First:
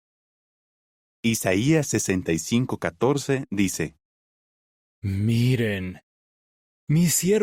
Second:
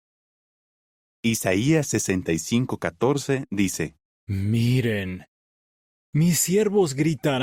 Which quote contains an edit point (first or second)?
second